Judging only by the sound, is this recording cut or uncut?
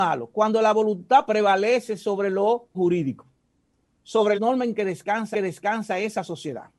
cut